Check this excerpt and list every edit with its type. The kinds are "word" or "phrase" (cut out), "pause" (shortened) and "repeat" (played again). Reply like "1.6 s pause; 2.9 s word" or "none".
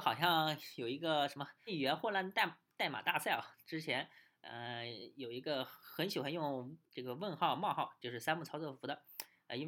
1.7 s word; 6.8 s pause